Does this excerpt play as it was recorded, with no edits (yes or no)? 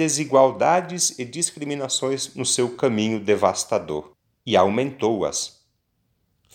yes